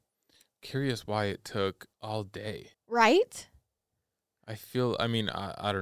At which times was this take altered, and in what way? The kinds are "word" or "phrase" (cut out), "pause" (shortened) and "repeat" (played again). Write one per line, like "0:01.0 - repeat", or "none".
0:01.9 - pause
0:02.7 - pause

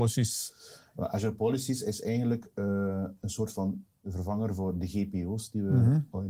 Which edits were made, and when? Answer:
none

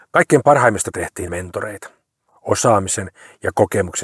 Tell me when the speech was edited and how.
0:00.9 - word
0:01.3 - word

